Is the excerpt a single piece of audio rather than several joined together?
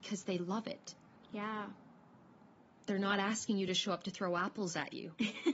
yes; 0 cuts

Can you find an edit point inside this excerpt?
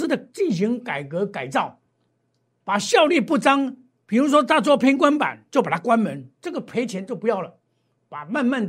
no; 0 cuts

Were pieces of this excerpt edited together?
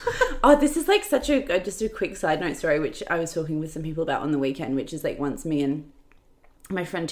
no; 0 cuts

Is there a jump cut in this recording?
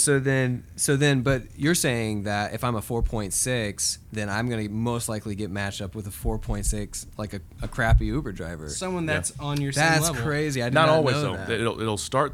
no; 0 cuts

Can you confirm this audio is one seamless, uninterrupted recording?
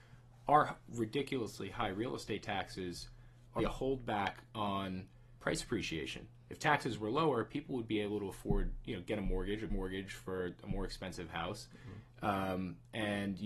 no; 3 cuts; at 3.6 s, 5.4 s, 9.7 s

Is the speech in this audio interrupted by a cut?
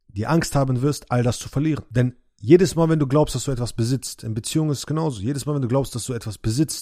no; 0 cuts

